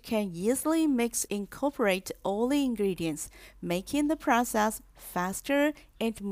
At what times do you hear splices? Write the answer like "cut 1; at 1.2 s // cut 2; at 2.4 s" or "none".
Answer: cut 1; at 1.3 s

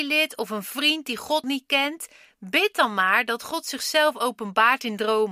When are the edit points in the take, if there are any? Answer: cut 1; at 1.4 s

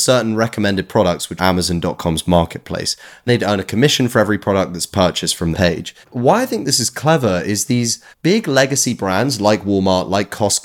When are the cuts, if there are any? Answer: cut 1; at 1.4 s // cut 2; at 3.3 s // cut 3; at 5.5 s // cut 4; at 6.0 s // cut 5; at 8.1 s

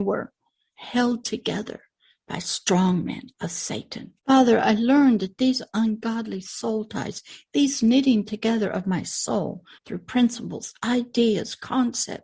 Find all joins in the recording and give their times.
cut 1; at 3.3 s // cut 2; at 4.2 s // cut 3; at 9.7 s

